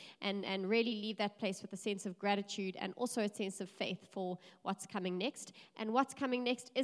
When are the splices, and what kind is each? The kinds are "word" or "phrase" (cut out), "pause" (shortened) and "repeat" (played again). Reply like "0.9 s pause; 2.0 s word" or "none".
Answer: none